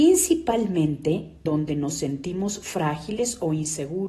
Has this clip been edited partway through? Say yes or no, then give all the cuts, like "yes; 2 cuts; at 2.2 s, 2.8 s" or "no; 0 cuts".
yes; 1 cut; at 1.5 s